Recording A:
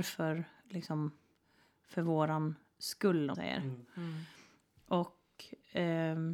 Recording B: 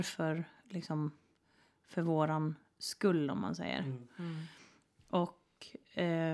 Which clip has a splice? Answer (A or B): A